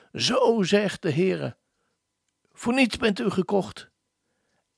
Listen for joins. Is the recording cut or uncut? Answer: uncut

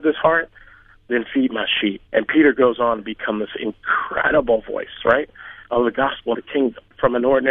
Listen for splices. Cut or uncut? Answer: cut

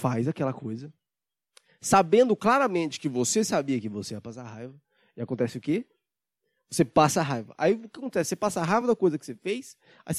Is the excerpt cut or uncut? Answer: uncut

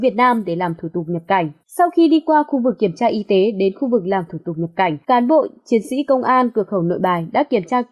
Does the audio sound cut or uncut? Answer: cut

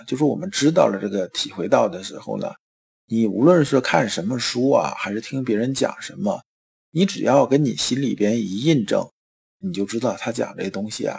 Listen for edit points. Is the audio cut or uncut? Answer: uncut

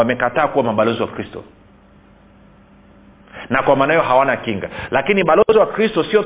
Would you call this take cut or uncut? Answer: uncut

